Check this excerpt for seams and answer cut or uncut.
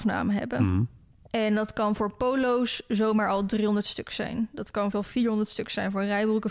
cut